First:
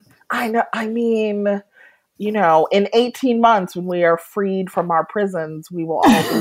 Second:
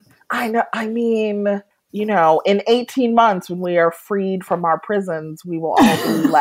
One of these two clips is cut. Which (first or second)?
second